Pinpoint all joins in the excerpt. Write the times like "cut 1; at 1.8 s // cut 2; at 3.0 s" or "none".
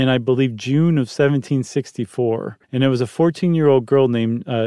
cut 1; at 2.6 s